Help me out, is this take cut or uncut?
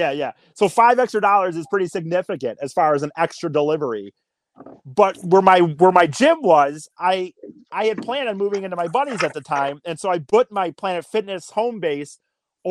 uncut